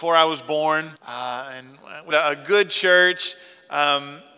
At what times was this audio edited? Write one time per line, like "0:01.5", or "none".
0:01.0
0:02.1